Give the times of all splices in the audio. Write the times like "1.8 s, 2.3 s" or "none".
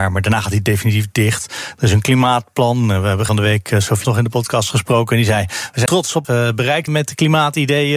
3.3 s, 4.0 s, 5.9 s, 6.2 s, 6.9 s